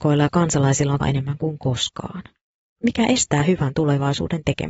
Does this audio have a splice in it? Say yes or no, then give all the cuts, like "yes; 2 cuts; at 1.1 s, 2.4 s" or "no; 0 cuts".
yes; 1 cut; at 1.0 s